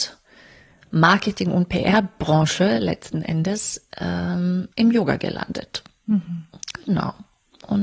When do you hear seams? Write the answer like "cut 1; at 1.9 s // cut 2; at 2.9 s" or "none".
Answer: cut 1; at 4.7 s